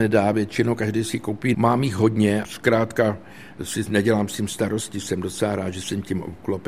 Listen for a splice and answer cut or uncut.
cut